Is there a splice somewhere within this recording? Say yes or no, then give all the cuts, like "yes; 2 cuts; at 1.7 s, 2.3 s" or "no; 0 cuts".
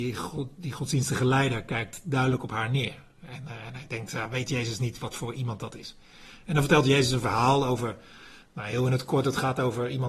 no; 0 cuts